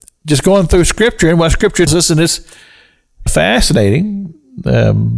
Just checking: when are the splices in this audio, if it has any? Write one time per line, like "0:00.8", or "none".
0:01.9
0:03.3